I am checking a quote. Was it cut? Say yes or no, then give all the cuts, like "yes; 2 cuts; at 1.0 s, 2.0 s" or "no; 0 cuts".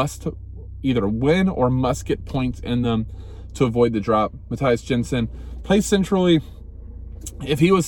no; 0 cuts